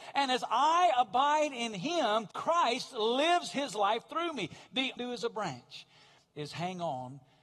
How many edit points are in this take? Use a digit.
2